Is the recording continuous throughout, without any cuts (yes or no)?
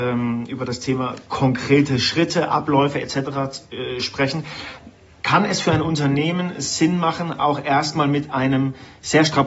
yes